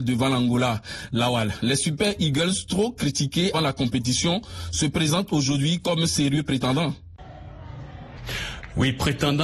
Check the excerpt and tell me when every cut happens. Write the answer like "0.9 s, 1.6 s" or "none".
3.5 s

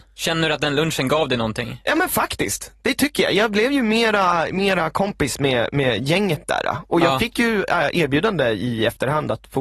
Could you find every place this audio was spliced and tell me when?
none

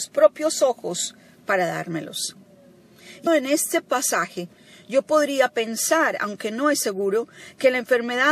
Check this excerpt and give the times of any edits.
3.3 s

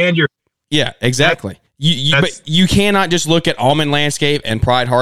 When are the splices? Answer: 1.7 s

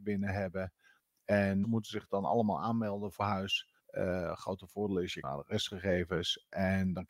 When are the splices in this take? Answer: 1.6 s, 3.2 s, 3.8 s, 5.2 s

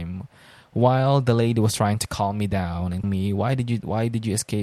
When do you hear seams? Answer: 3.0 s

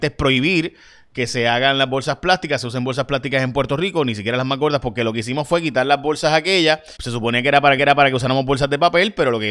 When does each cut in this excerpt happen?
7.0 s, 7.8 s

